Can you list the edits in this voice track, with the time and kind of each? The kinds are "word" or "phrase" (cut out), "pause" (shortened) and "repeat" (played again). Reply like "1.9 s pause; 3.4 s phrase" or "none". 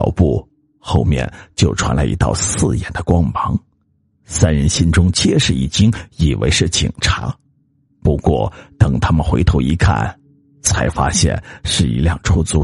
none